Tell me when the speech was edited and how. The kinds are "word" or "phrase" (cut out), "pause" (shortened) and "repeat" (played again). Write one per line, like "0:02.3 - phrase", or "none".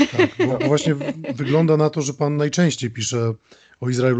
none